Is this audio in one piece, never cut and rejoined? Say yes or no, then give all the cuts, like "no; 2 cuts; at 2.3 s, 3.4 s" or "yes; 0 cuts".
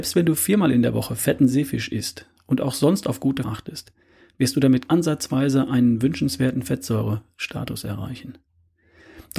no; 2 cuts; at 3.4 s, 4.9 s